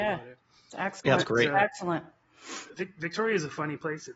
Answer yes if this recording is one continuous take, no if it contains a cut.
yes